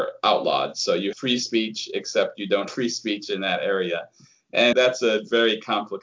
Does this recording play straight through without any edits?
no; 3 cuts; at 1.1 s, 2.7 s, 4.7 s

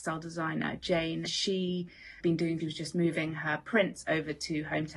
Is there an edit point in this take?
yes; 3 cuts; at 1.3 s, 2.2 s, 2.6 s

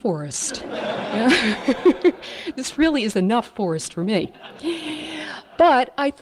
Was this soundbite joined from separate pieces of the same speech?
no; 0 cuts

